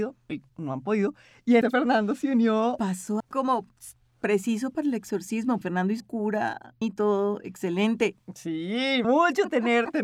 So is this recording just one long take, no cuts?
no; 6 cuts; at 1.6 s, 3.2 s, 5.6 s, 6.0 s, 6.8 s, 9.0 s

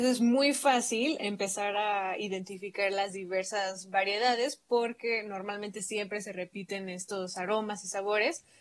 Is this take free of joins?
yes; 0 cuts

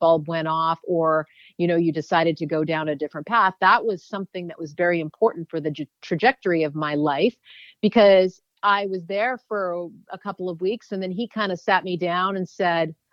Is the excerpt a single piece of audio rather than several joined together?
yes; 0 cuts

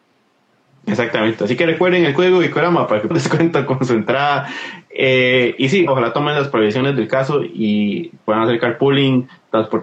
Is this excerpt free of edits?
no; 2 cuts; at 3.1 s, 5.9 s

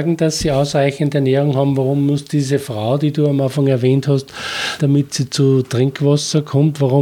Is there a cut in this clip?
yes; 1 cut; at 4.8 s

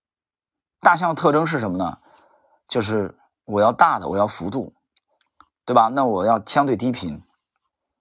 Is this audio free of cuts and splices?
yes; 0 cuts

